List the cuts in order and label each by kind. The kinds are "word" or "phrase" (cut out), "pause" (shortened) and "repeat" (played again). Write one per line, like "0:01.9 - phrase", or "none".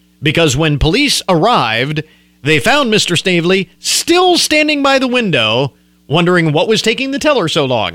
none